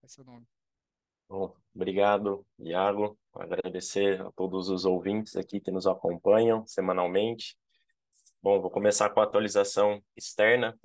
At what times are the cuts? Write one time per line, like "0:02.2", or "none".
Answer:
none